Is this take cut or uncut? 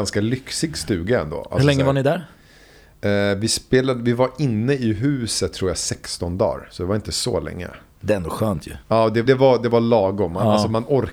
cut